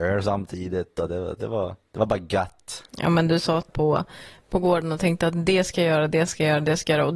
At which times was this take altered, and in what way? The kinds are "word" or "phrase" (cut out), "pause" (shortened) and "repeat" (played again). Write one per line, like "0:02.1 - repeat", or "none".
0:01.8 - pause
0:02.9 - pause
0:03.7 - phrase